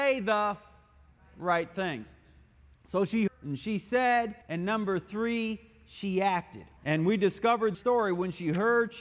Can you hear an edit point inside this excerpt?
yes; 4 cuts; at 3.3 s, 4.4 s, 6.8 s, 7.7 s

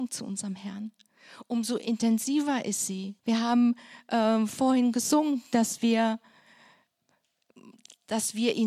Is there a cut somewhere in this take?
yes; 1 cut; at 3.2 s

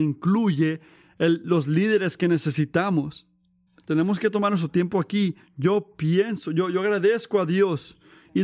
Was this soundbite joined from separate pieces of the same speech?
yes; 1 cut; at 3.7 s

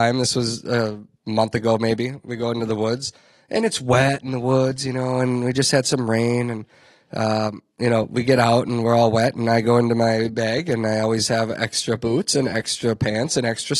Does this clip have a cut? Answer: no; 0 cuts

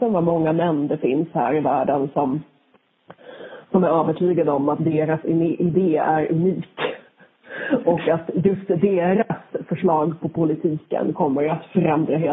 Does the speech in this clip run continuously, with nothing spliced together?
yes; 0 cuts

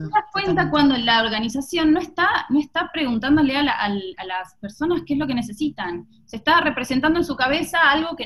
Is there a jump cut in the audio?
no; 0 cuts

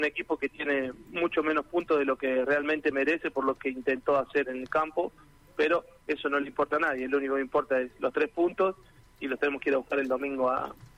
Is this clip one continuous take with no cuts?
yes; 0 cuts

